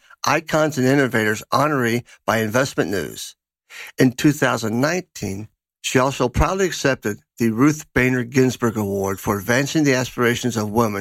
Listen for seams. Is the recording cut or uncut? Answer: uncut